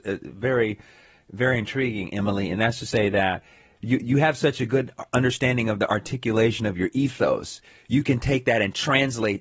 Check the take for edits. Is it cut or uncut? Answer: uncut